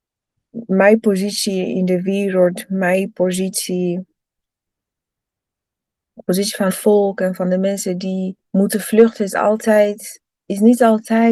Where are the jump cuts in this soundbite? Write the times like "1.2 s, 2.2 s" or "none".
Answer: 6.7 s, 8.4 s